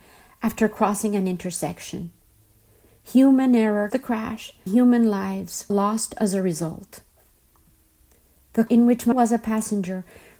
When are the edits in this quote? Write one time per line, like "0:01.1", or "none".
0:03.9
0:04.7
0:05.7
0:08.7
0:09.1

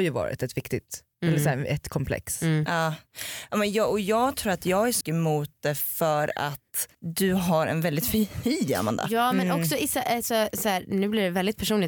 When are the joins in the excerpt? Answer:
0:05.0
0:06.9

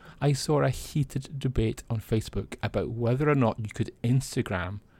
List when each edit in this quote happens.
none

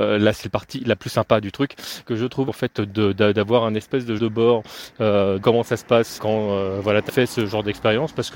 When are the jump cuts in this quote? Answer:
0:01.0
0:02.0
0:02.5
0:04.2
0:05.4
0:06.2
0:07.1

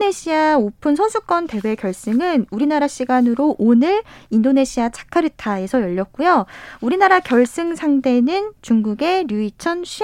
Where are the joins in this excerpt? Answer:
none

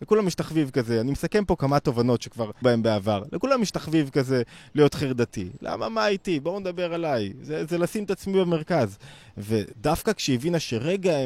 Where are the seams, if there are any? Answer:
0:02.6

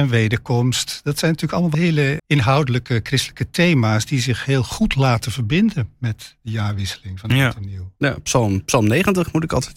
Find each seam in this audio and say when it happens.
0:01.7
0:02.2

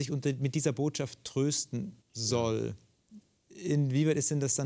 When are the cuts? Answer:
0:02.0

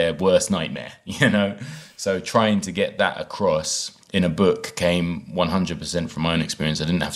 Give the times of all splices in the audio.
0:04.0

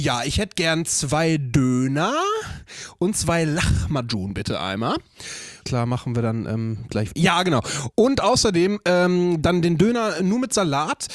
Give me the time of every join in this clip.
0:05.6

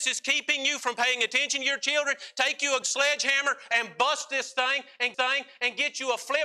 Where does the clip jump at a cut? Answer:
0:02.8
0:05.1

